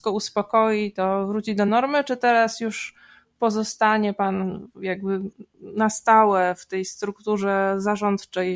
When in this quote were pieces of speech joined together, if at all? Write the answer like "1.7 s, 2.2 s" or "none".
none